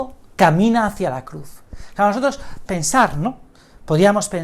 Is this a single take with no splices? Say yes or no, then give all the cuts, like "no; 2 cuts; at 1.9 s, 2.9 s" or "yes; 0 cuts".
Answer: no; 1 cut; at 2.7 s